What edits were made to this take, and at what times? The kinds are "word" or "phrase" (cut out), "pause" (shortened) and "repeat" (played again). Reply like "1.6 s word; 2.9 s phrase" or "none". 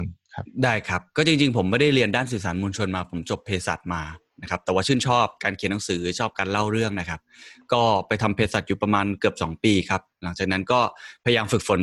none